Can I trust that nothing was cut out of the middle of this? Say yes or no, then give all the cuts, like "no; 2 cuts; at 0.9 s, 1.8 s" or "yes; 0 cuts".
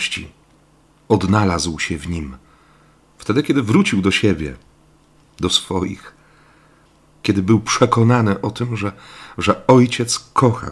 yes; 0 cuts